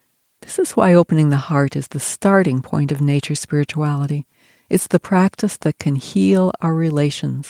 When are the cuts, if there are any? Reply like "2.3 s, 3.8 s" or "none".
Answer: none